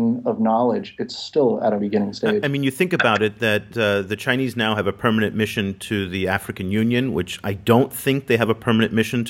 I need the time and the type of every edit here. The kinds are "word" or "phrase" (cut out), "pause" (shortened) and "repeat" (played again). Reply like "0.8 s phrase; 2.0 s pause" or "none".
1.8 s word